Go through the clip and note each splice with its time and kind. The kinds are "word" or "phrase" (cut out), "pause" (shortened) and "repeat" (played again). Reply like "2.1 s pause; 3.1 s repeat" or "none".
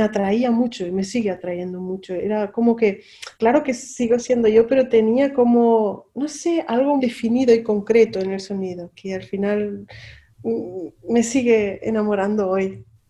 3.3 s pause; 7.0 s word; 8.9 s word